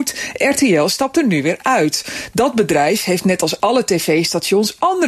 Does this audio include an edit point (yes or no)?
no